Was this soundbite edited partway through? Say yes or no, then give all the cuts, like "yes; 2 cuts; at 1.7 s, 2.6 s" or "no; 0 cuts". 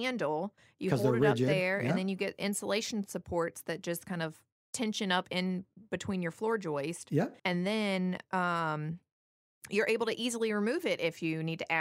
yes; 1 cut; at 7.4 s